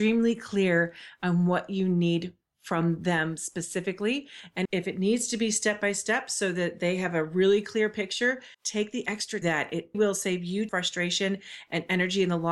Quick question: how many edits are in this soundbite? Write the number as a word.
five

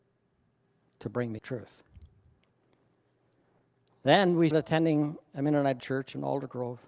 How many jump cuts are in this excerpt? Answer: three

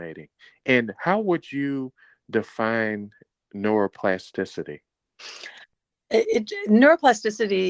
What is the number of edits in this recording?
zero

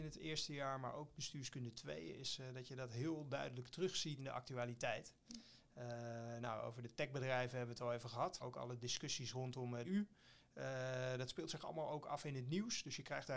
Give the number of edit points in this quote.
three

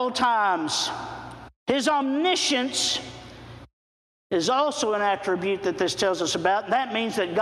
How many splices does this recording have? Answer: one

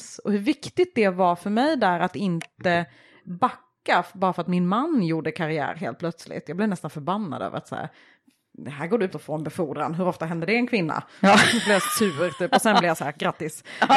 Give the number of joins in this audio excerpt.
one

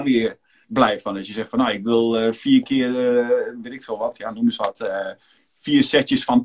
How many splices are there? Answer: one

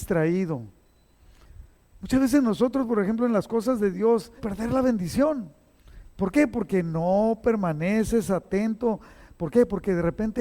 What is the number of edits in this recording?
one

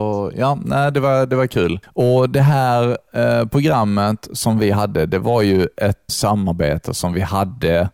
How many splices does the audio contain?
two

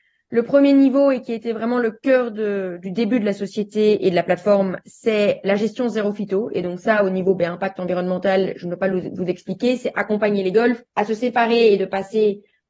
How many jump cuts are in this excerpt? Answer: two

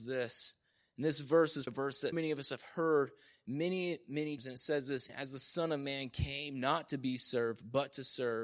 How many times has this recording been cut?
four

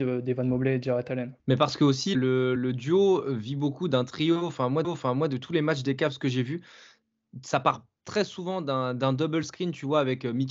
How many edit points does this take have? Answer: four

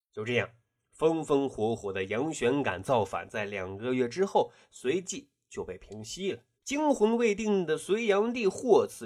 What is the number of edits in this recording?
one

